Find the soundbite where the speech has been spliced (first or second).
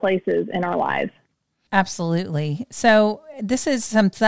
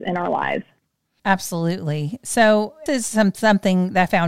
second